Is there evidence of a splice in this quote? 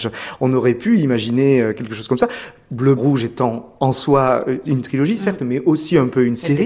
yes; 1 cut; at 3.0 s

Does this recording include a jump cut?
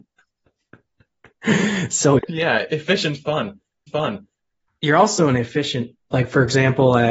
yes; 3 cuts; at 2.2 s, 3.9 s, 5.9 s

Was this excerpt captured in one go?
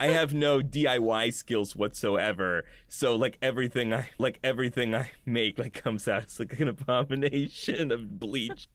no; 1 cut; at 4.2 s

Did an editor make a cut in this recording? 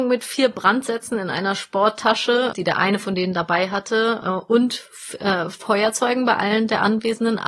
yes; 1 cut; at 2.5 s

